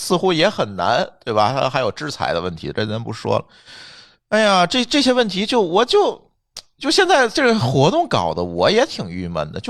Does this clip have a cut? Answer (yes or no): no